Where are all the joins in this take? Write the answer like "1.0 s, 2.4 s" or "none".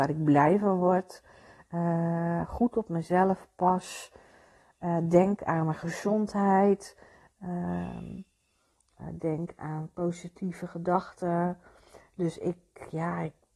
none